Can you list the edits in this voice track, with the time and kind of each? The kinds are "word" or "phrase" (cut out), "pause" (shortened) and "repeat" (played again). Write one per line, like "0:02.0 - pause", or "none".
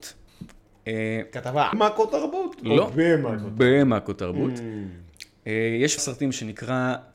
0:01.7 - word
0:06.0 - word